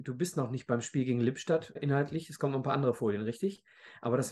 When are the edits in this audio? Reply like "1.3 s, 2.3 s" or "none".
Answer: 1.8 s